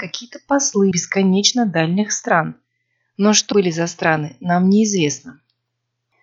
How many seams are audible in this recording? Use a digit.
2